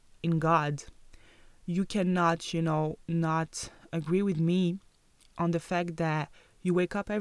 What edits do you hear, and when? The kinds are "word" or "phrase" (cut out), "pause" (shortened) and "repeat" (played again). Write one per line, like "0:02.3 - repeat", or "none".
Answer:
none

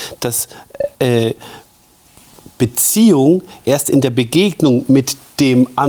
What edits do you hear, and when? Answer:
0:00.9 - pause

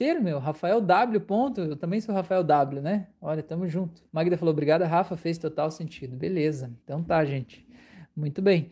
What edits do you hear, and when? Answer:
0:04.1 - pause
0:06.8 - pause

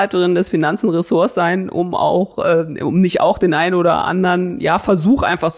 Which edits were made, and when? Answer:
none

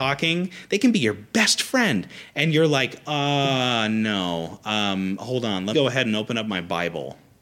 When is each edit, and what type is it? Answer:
0:05.7 - word

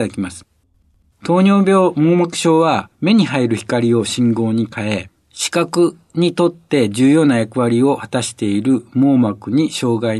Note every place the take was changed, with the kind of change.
0:02.9 - pause

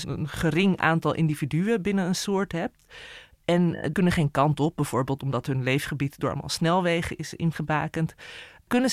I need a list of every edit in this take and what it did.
0:03.9 - word

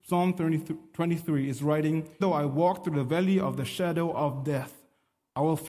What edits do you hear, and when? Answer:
0:02.2 - word

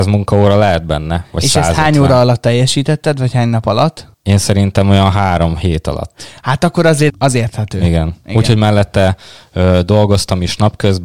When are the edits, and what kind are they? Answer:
0:04.1 - pause
0:07.1 - word

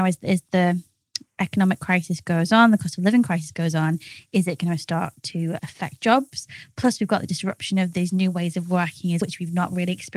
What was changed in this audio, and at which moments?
0:05.6 - word
0:09.2 - word

